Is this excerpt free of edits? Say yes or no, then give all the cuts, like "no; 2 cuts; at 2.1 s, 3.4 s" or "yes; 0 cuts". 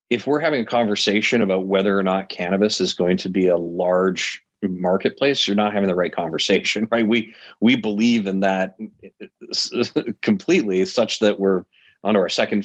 yes; 0 cuts